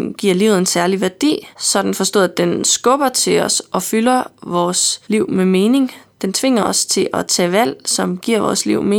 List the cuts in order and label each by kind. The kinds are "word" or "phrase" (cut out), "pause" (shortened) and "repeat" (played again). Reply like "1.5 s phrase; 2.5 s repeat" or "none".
1.5 s pause; 5.0 s pause